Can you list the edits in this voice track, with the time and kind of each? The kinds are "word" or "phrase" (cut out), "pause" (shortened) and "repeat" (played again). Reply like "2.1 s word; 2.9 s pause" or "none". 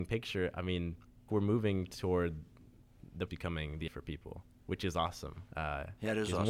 1.3 s phrase; 3.3 s word; 3.9 s word; 5.5 s pause